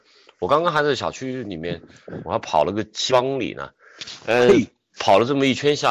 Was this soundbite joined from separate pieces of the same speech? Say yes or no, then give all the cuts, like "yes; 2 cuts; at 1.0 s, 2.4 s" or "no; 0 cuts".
no; 0 cuts